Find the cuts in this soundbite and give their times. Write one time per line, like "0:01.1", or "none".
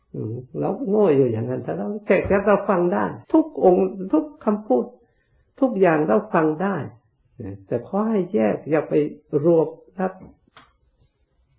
0:03.2